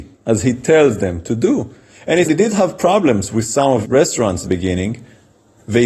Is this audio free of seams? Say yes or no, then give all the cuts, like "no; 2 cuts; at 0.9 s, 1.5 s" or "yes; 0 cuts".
no; 3 cuts; at 2.2 s, 3.8 s, 4.5 s